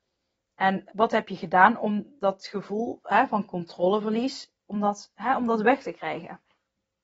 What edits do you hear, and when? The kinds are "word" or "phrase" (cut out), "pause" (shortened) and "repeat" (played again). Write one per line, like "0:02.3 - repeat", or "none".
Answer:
0:00.9 - word